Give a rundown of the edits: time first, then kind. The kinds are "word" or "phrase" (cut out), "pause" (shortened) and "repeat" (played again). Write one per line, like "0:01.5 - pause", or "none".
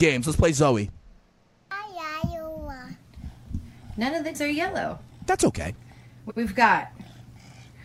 0:04.3 - word